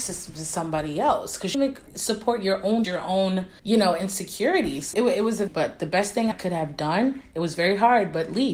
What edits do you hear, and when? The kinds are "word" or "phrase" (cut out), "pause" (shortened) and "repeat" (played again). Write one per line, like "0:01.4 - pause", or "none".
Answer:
0:01.5 - phrase
0:01.9 - pause
0:02.8 - word
0:03.6 - pause
0:04.9 - word
0:05.5 - phrase
0:06.3 - word